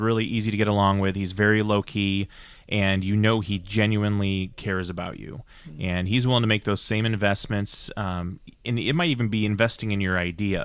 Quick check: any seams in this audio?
no; 0 cuts

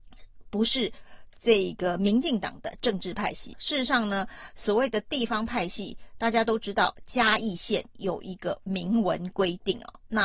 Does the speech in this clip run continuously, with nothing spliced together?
no; 1 cut; at 3.5 s

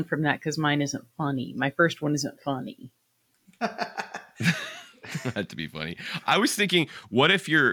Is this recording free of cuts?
yes; 0 cuts

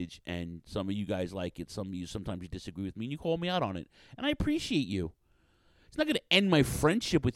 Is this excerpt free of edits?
yes; 0 cuts

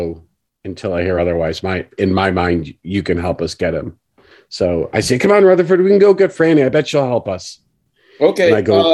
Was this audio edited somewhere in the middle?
no; 0 cuts

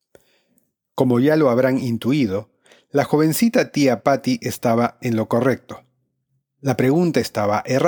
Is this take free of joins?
yes; 0 cuts

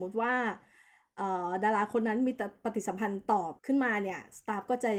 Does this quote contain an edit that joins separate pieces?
yes; 1 cut; at 3.6 s

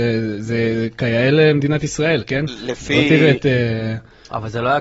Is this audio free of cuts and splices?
yes; 0 cuts

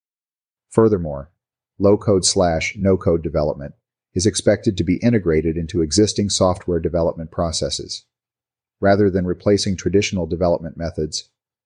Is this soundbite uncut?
yes; 0 cuts

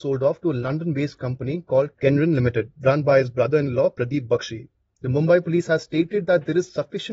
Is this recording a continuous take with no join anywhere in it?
yes; 0 cuts

